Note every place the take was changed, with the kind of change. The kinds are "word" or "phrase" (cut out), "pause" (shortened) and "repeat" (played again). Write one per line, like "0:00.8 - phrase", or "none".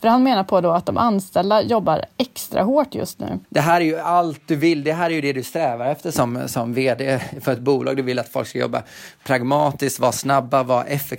0:03.4 - pause